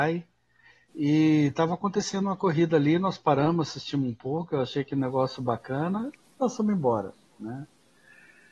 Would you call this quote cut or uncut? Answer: uncut